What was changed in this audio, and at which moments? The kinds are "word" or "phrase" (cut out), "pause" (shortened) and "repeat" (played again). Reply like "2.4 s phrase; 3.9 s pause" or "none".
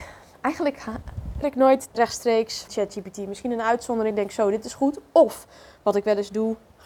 1.4 s word; 1.9 s word; 2.7 s word; 4.1 s word